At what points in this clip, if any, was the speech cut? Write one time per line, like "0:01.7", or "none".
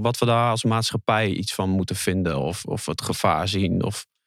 none